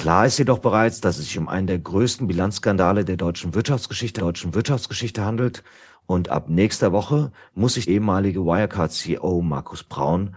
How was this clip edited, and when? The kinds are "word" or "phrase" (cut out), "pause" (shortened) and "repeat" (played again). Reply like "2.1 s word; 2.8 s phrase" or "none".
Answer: 4.2 s repeat; 7.9 s word